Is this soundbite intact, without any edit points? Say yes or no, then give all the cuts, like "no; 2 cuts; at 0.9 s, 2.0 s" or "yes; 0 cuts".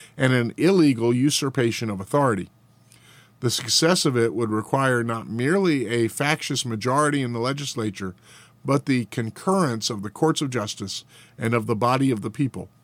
yes; 0 cuts